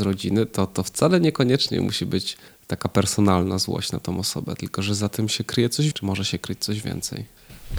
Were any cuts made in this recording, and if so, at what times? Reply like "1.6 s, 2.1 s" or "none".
5.9 s